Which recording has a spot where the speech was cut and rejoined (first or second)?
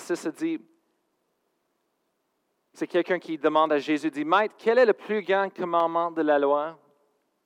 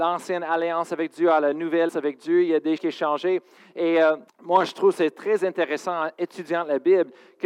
second